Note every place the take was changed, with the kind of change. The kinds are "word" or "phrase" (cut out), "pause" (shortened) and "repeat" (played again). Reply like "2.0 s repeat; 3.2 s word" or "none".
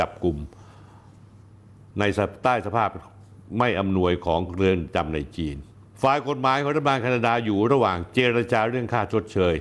5.8 s pause